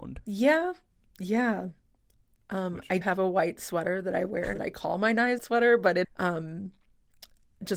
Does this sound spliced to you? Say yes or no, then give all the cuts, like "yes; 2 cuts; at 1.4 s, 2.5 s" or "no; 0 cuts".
yes; 4 cuts; at 3.0 s, 4.5 s, 5.4 s, 6.0 s